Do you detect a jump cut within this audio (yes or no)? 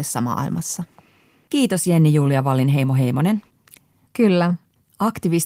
no